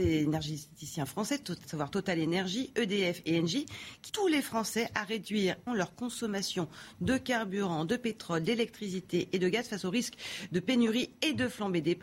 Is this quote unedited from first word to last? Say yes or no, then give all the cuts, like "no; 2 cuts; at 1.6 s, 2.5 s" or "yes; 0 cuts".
no; 3 cuts; at 1.6 s, 4.1 s, 5.7 s